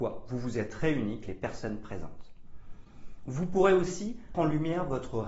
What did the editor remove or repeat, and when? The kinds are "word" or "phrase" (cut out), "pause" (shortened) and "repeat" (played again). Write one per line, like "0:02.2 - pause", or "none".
0:01.2 - word
0:04.3 - word